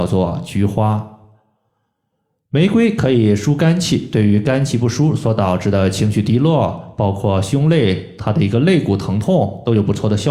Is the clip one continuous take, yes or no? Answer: yes